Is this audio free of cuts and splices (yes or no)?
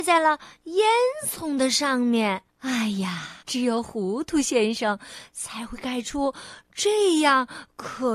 no